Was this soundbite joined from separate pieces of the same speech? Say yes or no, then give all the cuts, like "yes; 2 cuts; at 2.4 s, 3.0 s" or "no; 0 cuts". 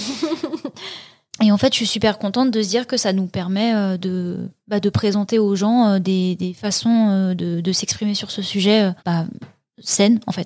yes; 1 cut; at 9.0 s